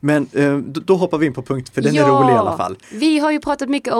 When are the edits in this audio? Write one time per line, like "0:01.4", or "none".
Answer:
0:01.7
0:02.8